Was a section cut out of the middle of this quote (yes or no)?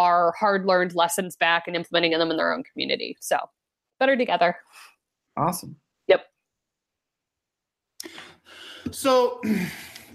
no